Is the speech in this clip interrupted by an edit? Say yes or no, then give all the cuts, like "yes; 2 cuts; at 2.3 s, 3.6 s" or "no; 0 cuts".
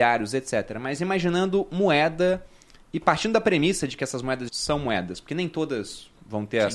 yes; 1 cut; at 4.5 s